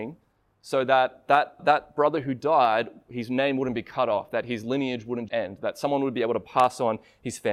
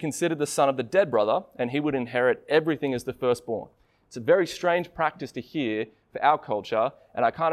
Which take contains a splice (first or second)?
first